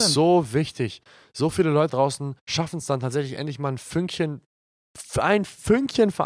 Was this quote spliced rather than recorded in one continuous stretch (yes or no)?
yes